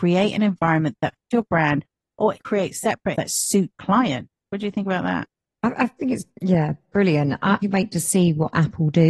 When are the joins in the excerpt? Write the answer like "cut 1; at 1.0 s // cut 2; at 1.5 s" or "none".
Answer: cut 1; at 1.3 s // cut 2; at 2.4 s // cut 3; at 3.1 s // cut 4; at 3.7 s // cut 5; at 5.4 s // cut 6; at 6.3 s // cut 7; at 7.6 s